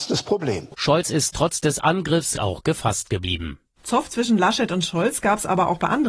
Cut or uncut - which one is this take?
cut